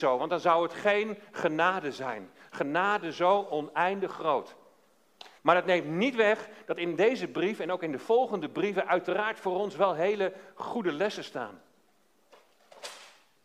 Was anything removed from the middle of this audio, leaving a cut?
yes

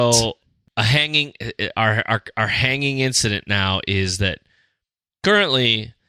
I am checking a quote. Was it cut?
no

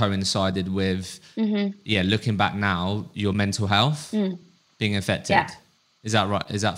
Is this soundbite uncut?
yes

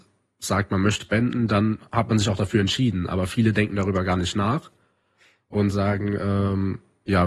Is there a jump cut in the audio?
yes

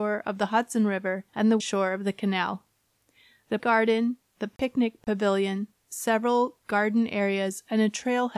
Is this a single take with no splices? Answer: no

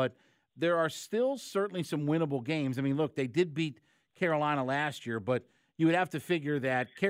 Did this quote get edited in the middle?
no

